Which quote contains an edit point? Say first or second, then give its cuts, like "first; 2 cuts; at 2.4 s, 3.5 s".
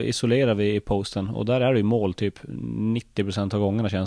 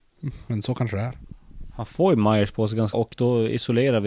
second; 1 cut; at 2.9 s